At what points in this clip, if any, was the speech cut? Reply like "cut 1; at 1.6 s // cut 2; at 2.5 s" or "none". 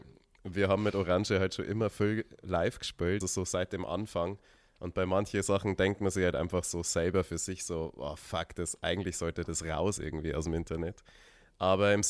cut 1; at 3.2 s